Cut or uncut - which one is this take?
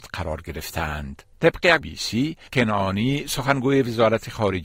cut